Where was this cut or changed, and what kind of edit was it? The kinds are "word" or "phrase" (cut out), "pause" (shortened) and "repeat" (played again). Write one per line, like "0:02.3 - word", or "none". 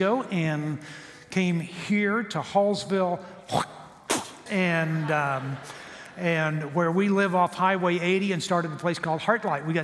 0:04.5 - word